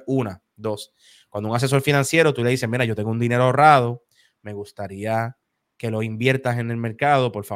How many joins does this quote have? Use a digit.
0